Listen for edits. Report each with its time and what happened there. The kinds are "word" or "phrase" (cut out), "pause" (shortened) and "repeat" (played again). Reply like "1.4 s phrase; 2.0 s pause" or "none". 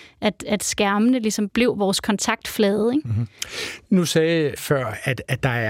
1.5 s word; 2.0 s phrase; 4.6 s phrase